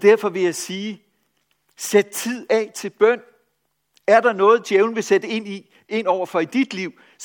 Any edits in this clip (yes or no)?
no